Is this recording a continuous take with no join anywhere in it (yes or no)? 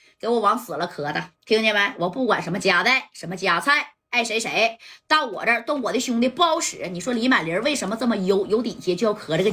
no